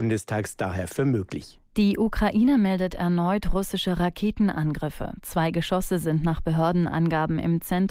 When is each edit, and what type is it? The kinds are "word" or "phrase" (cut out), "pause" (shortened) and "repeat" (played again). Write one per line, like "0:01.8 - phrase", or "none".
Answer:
0:01.7 - pause